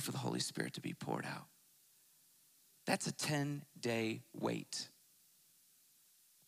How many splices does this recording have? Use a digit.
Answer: 0